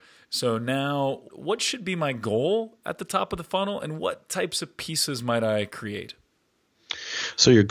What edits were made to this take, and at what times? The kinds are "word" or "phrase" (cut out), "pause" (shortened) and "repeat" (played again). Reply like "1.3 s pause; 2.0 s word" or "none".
1.3 s word